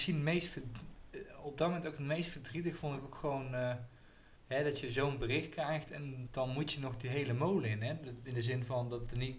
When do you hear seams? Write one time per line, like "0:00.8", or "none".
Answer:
0:04.4
0:06.3